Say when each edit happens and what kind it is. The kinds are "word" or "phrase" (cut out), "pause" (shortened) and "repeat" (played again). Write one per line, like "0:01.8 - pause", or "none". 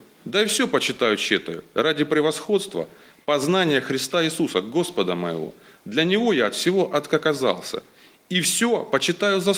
none

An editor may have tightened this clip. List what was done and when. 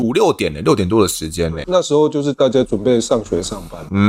0:01.6 - word

